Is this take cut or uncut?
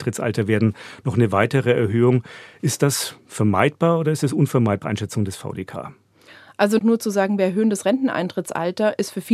cut